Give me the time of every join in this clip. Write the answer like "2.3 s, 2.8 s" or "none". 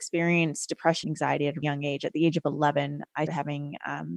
1.0 s, 1.6 s, 3.3 s